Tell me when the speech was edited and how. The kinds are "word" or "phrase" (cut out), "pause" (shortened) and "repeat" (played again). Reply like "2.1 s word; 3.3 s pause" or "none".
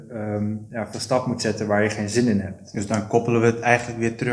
0.9 s phrase